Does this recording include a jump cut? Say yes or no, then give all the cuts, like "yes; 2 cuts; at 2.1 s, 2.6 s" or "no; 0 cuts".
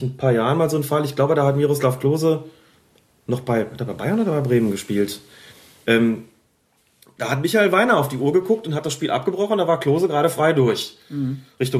no; 0 cuts